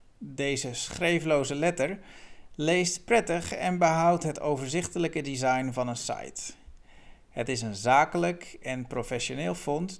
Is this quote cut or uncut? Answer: uncut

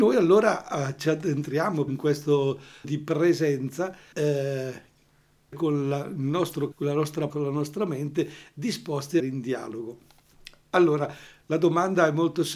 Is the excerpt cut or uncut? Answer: cut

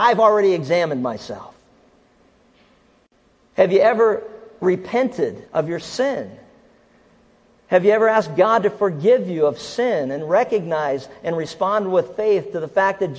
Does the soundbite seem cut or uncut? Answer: cut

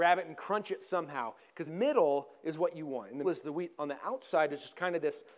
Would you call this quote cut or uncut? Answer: cut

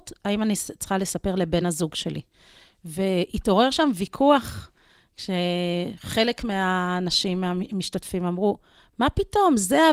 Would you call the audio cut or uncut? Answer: uncut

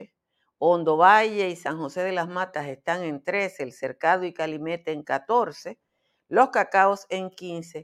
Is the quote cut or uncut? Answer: uncut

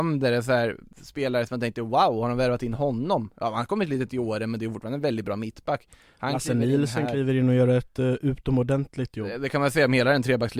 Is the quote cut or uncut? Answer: uncut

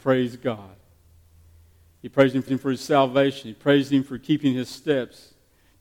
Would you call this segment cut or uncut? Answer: cut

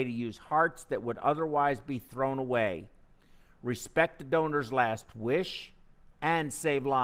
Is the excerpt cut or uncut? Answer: uncut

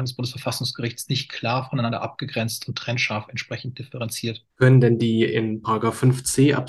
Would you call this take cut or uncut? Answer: cut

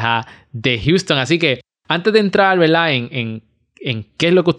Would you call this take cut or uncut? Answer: uncut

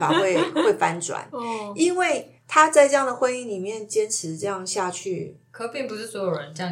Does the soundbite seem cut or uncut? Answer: cut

